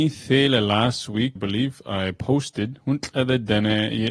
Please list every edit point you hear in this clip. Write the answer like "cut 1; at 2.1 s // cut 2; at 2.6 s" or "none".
cut 1; at 1.4 s